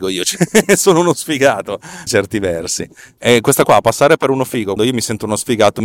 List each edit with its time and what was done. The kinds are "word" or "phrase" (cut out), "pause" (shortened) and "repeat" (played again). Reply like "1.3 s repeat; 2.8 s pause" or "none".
2.1 s word; 3.6 s word; 4.8 s word